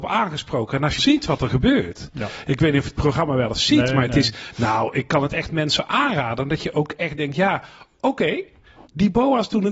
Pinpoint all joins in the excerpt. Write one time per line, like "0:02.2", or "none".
0:01.0